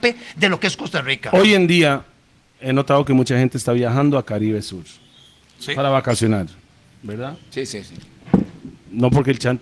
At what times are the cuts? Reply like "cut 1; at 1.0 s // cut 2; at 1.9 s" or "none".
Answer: none